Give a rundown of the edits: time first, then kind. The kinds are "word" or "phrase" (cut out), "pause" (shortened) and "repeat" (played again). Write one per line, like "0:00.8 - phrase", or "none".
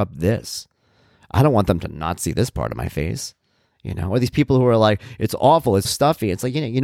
0:05.8 - word

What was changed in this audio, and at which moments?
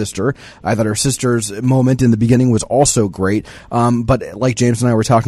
none

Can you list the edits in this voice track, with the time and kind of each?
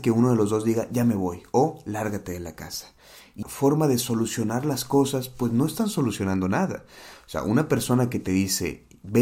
0:03.4 - word

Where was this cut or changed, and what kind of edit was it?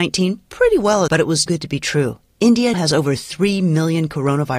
0:01.1 - phrase
0:01.5 - word
0:02.7 - word

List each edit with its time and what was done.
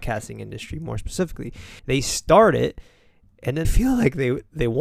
0:01.8 - pause
0:03.6 - word

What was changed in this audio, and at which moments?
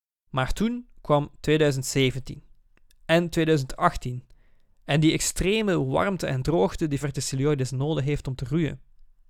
0:07.0 - word

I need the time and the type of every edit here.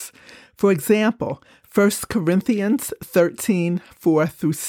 none

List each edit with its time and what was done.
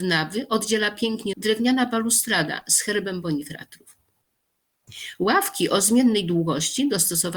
0:01.3 - word

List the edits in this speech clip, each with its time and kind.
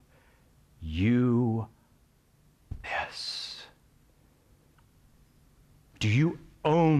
0:02.8 - word

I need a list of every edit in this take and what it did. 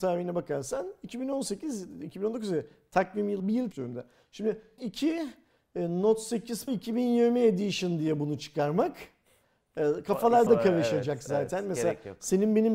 0:03.4 - word
0:03.7 - word
0:04.8 - word
0:06.7 - word
0:10.5 - word

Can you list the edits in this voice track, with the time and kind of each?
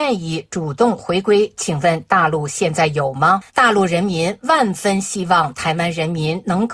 0:03.5 - pause

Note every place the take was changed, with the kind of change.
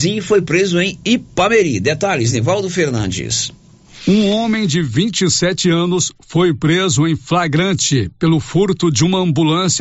none

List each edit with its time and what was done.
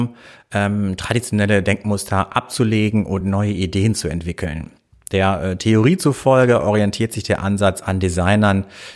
none

